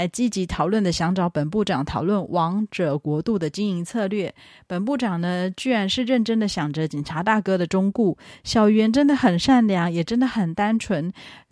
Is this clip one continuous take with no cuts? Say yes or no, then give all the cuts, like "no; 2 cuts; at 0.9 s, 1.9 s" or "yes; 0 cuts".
yes; 0 cuts